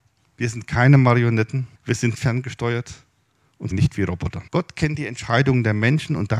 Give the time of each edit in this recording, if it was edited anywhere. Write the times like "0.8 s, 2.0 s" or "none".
1.7 s, 2.1 s, 3.7 s, 4.5 s